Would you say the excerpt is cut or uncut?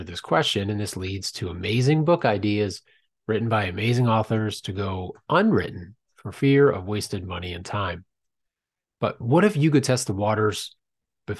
uncut